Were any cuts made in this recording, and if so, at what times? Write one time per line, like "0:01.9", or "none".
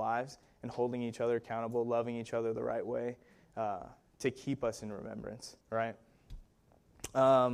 0:05.6